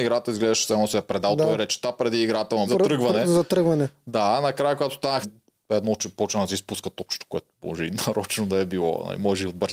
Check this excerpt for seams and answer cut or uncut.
cut